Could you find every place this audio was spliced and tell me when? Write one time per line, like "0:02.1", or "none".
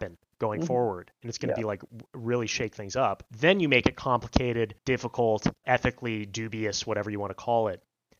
0:03.3
0:04.8